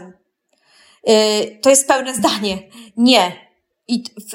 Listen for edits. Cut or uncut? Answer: uncut